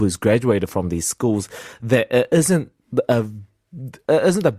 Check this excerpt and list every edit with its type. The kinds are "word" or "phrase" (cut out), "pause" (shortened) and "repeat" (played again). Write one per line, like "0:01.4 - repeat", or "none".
none

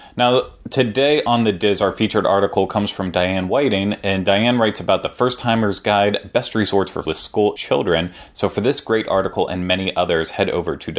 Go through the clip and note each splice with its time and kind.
0:07.0 - word
0:07.6 - word

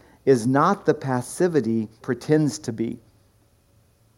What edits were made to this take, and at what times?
0:02.0 - word

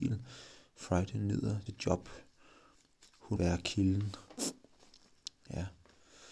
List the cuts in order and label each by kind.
0:01.7 - word
0:03.4 - word

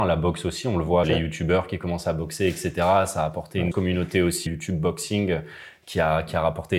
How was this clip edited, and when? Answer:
0:01.0 - word
0:03.7 - word
0:04.5 - word

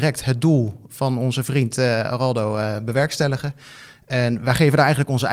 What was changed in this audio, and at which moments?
none

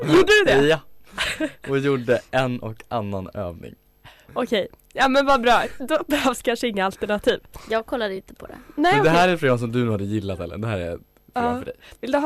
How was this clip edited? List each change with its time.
none

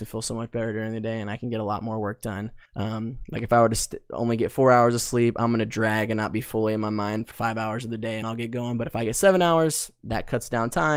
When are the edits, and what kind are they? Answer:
0:02.7 - pause
0:07.3 - word
0:08.2 - word

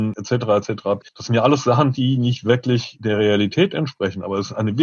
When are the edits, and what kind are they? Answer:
0:01.1 - pause

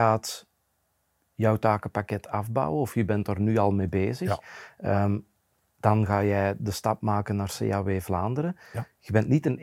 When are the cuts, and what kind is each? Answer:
none

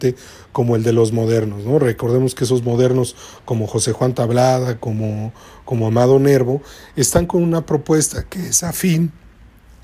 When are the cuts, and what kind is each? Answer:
none

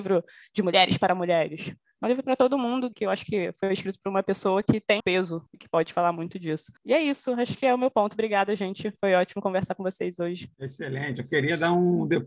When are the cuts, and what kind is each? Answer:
0:02.9 - phrase
0:05.0 - word
0:05.5 - pause
0:06.8 - pause
0:10.5 - pause

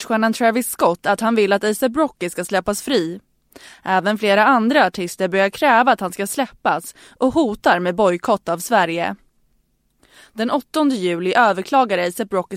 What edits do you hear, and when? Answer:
none

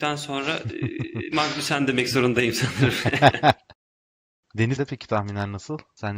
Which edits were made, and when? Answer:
0:04.8 - word

